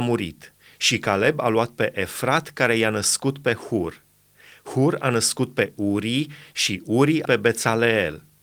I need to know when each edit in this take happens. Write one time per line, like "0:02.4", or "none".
0:07.3